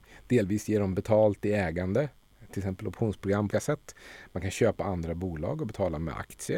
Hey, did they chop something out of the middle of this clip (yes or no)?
yes